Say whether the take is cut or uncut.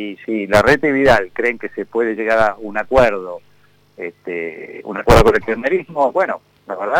uncut